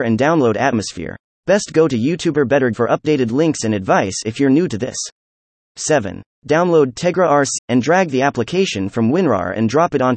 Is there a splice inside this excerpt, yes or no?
yes